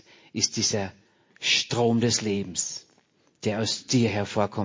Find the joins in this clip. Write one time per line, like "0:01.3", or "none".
none

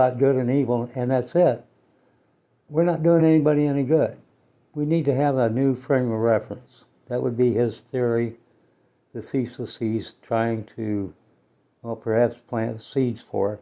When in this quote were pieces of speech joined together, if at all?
none

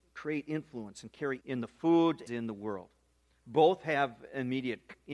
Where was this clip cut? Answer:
0:01.4
0:02.3

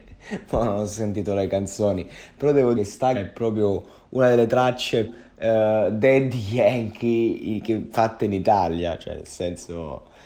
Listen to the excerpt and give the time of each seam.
0:02.7
0:03.1
0:05.1

